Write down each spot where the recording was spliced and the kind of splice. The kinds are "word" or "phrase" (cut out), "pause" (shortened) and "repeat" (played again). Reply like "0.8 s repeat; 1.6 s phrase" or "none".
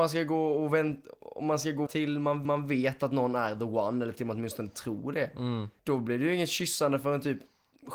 1.2 s pause; 1.9 s word; 2.4 s repeat; 5.8 s pause